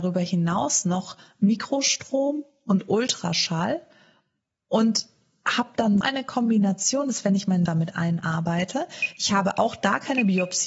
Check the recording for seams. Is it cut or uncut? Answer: cut